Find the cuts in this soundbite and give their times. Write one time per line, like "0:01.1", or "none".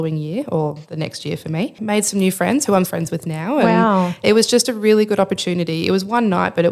0:02.8
0:04.2